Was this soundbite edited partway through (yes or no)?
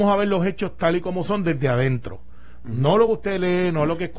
no